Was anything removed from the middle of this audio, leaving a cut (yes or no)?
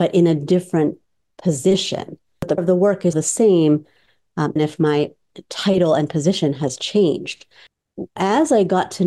yes